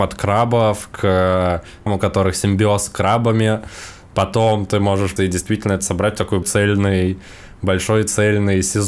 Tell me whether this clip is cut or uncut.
cut